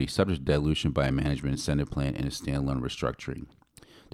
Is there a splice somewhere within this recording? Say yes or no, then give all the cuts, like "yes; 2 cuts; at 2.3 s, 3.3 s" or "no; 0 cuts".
no; 0 cuts